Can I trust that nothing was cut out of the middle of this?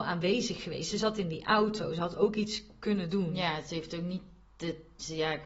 yes; 0 cuts

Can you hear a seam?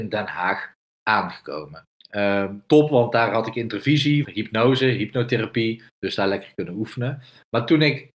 yes; 3 cuts; at 1.9 s, 4.2 s, 5.9 s

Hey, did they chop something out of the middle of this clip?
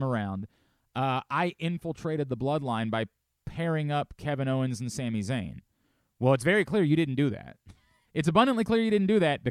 yes; 1 cut; at 8.1 s

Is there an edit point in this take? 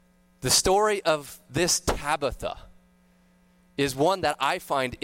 no; 0 cuts

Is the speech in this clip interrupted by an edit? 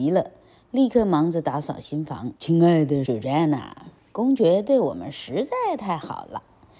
yes; 2 cuts; at 2.4 s, 3.1 s

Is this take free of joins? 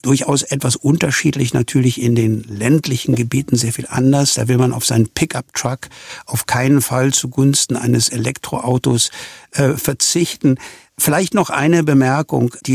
yes; 0 cuts

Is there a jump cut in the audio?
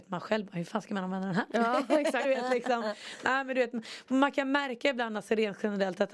yes; 1 cut; at 2.2 s

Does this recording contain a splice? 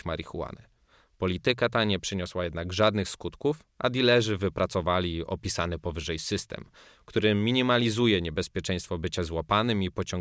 no; 0 cuts

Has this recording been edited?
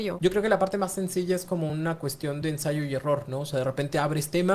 no; 0 cuts

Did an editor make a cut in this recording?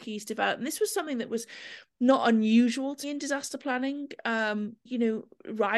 yes; 2 cuts; at 3.0 s, 4.9 s

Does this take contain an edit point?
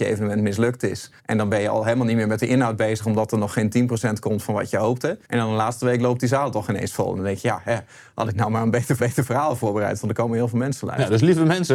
yes; 3 cuts; at 1.2 s, 5.2 s, 9.0 s

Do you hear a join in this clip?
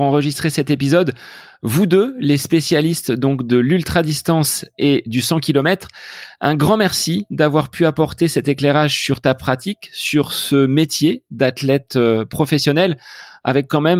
no; 0 cuts

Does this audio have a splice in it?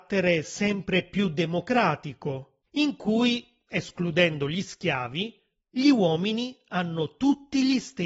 no; 0 cuts

